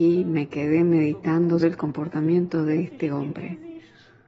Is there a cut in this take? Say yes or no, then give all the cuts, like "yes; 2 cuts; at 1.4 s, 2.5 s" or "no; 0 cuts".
yes; 1 cut; at 1.6 s